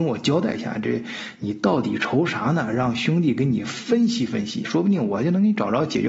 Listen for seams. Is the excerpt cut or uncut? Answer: cut